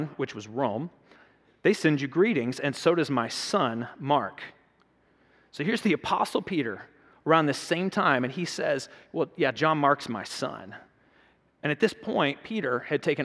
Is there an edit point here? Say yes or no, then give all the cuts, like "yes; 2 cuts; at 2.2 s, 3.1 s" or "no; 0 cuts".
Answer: no; 0 cuts